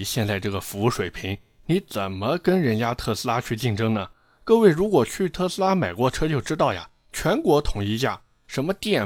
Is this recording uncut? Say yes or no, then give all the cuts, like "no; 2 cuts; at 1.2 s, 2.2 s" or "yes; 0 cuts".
yes; 0 cuts